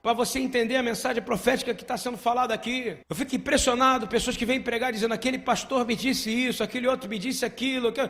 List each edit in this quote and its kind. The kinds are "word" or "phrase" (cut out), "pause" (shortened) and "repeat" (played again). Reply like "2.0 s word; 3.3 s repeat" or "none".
3.0 s pause